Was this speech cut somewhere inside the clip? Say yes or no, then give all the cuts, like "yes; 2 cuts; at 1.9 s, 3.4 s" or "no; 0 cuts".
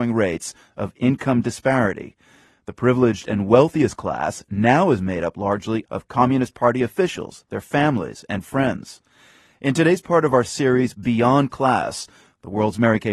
no; 0 cuts